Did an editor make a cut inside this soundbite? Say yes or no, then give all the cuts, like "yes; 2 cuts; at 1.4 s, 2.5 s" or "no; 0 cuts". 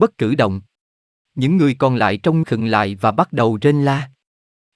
yes; 1 cut; at 2.4 s